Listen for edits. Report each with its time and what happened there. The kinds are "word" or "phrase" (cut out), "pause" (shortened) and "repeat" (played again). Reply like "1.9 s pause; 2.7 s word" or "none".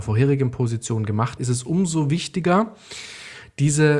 1.4 s word